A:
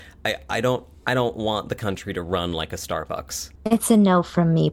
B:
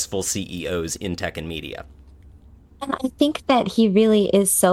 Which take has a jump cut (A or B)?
A